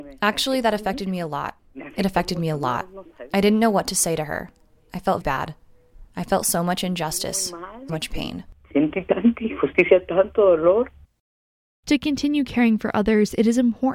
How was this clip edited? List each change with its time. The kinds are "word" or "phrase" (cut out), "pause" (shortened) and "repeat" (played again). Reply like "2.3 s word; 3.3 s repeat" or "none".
5.2 s word; 7.9 s word